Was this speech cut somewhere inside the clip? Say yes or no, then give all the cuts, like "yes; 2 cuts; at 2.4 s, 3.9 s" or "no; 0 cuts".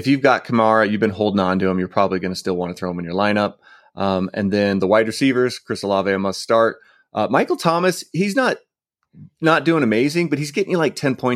no; 0 cuts